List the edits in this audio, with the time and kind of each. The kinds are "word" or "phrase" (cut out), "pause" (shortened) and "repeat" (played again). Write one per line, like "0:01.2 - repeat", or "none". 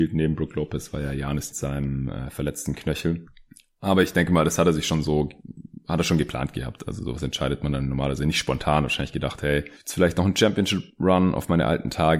0:01.5 - phrase